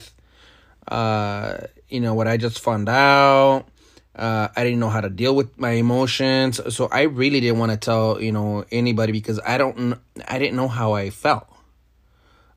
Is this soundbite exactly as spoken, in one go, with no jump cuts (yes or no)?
yes